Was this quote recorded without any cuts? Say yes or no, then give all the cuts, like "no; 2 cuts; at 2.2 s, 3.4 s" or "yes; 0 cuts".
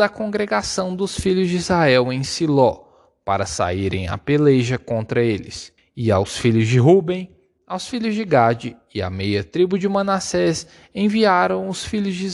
no; 1 cut; at 5.8 s